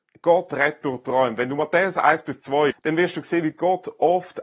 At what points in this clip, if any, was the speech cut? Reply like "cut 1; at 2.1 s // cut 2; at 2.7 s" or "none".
cut 1; at 2.7 s